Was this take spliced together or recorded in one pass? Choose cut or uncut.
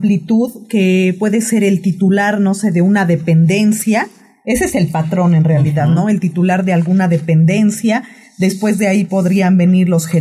uncut